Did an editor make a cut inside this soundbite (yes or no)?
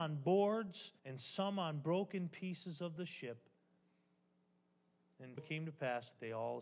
yes